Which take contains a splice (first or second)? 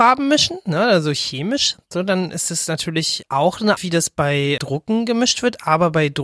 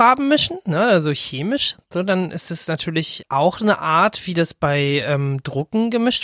first